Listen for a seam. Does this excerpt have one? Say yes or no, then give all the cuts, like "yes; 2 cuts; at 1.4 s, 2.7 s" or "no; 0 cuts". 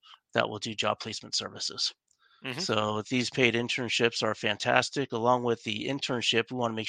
no; 0 cuts